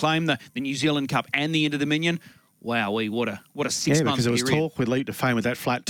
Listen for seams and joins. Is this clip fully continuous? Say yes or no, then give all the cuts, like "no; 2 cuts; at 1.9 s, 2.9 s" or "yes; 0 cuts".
yes; 0 cuts